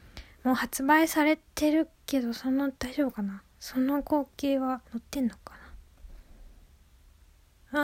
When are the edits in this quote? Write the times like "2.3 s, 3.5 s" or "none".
1.5 s, 1.9 s, 2.8 s, 4.9 s